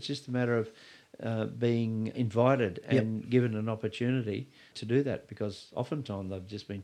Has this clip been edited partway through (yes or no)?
yes